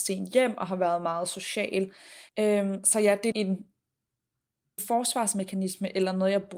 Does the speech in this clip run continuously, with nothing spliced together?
no; 3 cuts; at 2.3 s, 3.3 s, 4.8 s

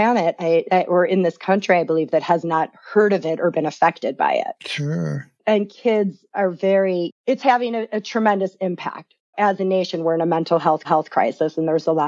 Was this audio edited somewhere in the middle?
yes; 3 cuts; at 5.4 s, 7.2 s, 10.8 s

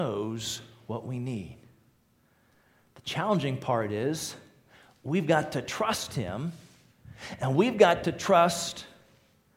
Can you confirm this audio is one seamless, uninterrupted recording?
yes; 0 cuts

